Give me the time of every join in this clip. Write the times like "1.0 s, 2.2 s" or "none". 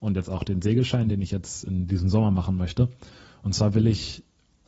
none